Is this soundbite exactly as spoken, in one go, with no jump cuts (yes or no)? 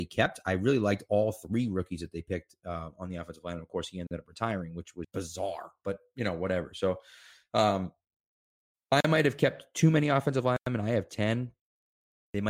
no